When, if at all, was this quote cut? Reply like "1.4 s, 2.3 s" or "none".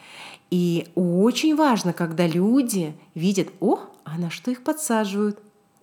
none